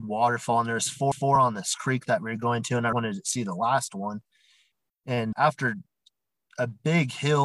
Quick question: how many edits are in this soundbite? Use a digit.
3